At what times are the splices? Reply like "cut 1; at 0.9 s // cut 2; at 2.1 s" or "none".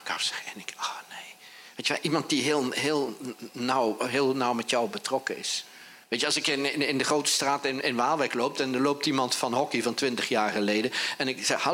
cut 1; at 6.0 s